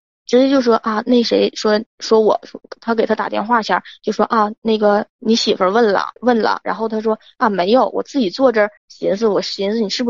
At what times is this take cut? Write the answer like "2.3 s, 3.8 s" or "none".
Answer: 1.9 s, 6.2 s, 8.8 s